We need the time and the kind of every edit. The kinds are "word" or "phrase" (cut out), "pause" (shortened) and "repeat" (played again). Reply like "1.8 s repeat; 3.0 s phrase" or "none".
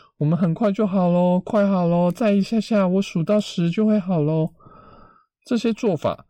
none